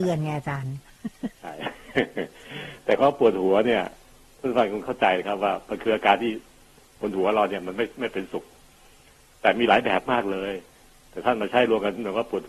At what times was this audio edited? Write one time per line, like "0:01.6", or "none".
none